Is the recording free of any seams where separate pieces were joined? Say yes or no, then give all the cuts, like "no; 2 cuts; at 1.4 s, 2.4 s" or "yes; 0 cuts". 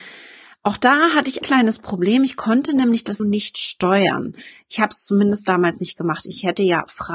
no; 2 cuts; at 1.4 s, 3.2 s